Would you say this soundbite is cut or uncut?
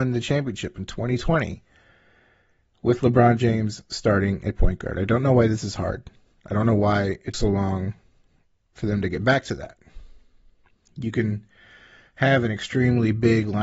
cut